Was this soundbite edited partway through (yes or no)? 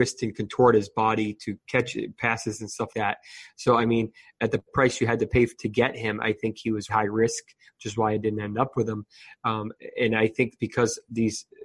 yes